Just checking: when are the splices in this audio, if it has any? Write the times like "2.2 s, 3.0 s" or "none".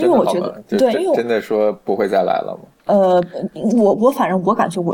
2.7 s

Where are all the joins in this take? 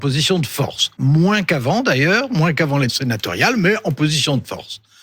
1.0 s, 2.9 s

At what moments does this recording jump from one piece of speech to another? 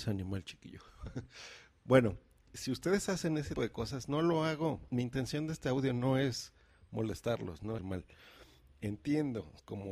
2.5 s, 3.6 s, 7.8 s

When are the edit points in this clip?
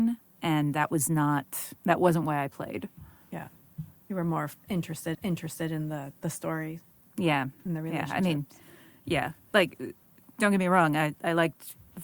1.8 s, 5.1 s, 11.1 s

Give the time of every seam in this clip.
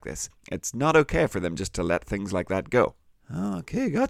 none

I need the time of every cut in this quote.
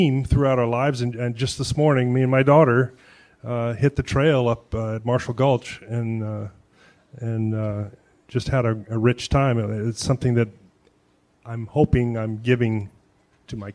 none

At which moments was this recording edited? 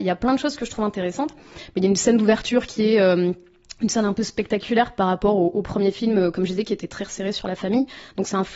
none

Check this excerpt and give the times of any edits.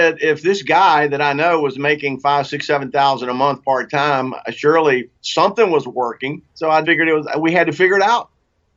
5.2 s, 6.5 s, 6.8 s

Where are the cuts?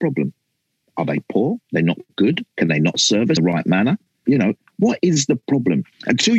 1.6 s, 2.5 s, 3.4 s, 4.2 s

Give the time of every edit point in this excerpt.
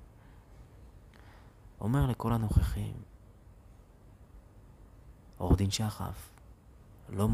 none

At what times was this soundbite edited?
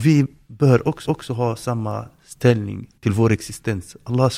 1.0 s, 3.0 s

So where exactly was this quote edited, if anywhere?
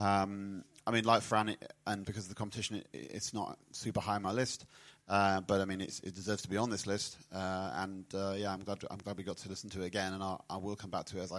2.0 s

